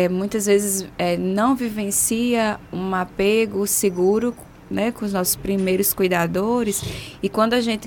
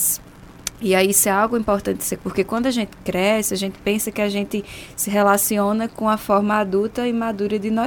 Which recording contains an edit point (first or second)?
second